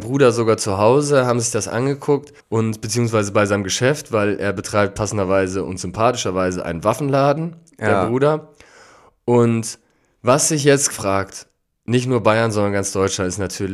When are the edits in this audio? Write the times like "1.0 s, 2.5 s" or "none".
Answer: 2.4 s, 10.9 s